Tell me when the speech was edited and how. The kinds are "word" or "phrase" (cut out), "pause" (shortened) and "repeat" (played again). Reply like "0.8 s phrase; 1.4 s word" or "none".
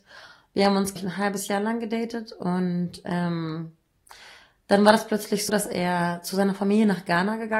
1.0 s word; 5.5 s word